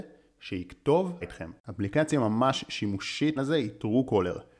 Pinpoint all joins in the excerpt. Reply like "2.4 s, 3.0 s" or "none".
1.2 s, 1.6 s, 3.4 s